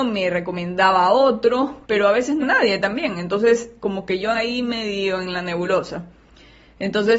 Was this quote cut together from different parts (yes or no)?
yes